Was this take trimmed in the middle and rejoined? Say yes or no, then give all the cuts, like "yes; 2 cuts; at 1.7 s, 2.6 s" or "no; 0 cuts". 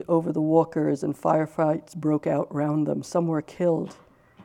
no; 0 cuts